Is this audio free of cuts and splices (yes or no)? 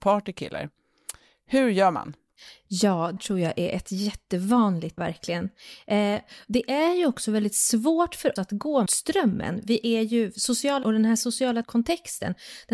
no